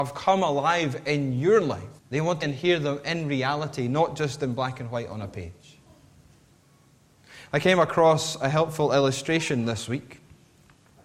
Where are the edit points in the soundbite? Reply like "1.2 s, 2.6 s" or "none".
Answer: 2.0 s, 2.4 s